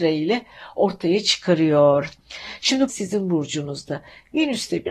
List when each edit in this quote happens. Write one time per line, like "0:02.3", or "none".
0:02.9